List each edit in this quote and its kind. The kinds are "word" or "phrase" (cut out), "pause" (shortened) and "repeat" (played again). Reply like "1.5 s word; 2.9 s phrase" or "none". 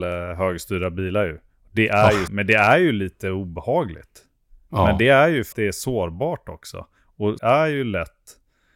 2.3 s word; 5.5 s word; 7.4 s word